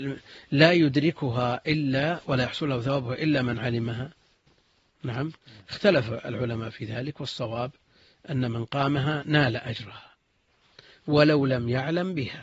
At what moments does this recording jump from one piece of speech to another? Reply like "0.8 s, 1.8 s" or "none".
none